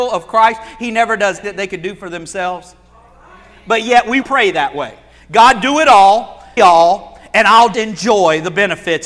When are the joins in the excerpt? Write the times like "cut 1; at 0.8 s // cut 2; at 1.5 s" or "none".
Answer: cut 1; at 1.4 s // cut 2; at 4.2 s // cut 3; at 6.6 s // cut 4; at 7.7 s